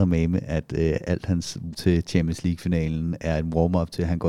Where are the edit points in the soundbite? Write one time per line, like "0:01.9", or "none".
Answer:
0:01.7